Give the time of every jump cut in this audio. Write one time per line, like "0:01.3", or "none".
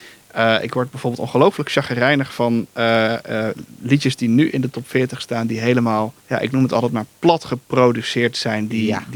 0:06.2
0:07.1